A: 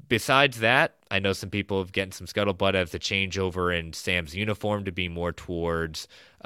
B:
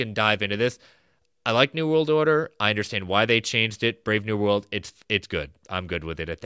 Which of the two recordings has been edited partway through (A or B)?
A